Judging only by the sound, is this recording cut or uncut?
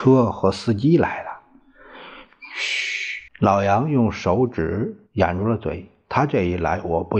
cut